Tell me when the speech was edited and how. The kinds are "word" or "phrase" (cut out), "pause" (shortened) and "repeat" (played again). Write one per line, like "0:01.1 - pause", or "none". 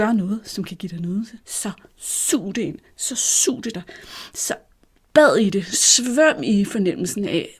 0:01.4 - pause
0:03.7 - word